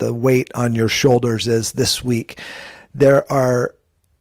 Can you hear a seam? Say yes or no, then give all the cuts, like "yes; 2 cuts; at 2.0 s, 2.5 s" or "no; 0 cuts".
no; 0 cuts